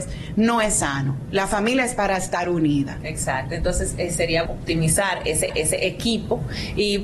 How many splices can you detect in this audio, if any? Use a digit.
2